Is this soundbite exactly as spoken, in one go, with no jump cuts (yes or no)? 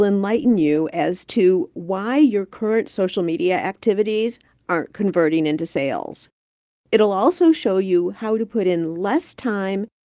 yes